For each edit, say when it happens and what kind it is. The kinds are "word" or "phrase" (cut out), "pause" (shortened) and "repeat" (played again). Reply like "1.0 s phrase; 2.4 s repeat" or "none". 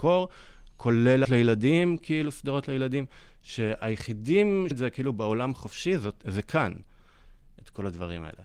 1.2 s word; 4.7 s word